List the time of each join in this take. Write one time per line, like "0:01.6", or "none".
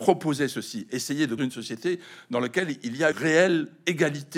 0:01.4
0:03.1